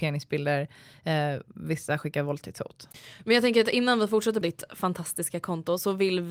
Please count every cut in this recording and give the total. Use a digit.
1